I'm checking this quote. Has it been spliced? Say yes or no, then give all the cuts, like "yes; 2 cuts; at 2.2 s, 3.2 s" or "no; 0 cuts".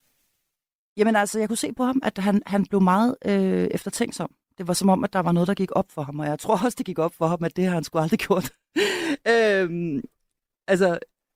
no; 0 cuts